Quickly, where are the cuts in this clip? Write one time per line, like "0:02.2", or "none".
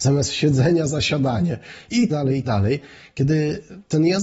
0:02.1
0:02.4